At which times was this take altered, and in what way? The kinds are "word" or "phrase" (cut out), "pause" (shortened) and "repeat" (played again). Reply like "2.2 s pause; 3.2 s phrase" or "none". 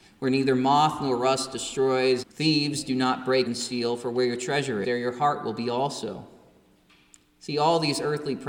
2.2 s word; 3.5 s word; 4.8 s word